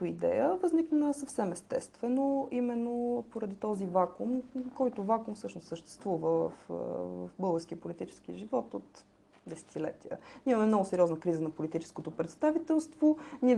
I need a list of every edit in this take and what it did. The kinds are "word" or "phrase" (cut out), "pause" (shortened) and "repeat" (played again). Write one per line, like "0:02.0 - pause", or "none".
none